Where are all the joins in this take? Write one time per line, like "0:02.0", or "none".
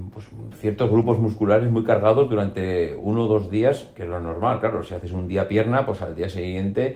none